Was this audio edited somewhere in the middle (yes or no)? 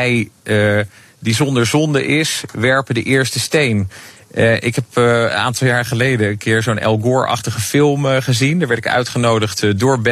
no